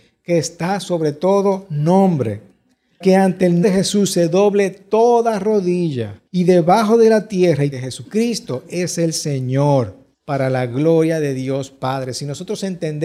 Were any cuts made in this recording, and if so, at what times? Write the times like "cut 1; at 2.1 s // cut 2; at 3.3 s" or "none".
cut 1; at 3.0 s // cut 2; at 3.6 s // cut 3; at 6.3 s // cut 4; at 7.7 s // cut 5; at 10.1 s

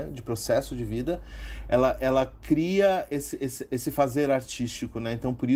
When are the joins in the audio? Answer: none

